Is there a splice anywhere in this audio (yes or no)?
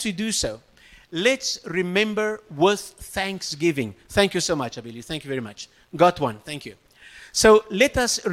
no